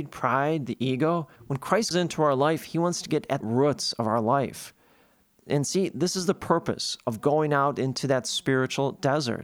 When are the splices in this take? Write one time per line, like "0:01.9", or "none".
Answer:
0:01.4
0:01.9
0:03.4